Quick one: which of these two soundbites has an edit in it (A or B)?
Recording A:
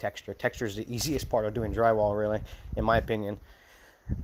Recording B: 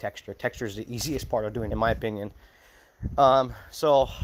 B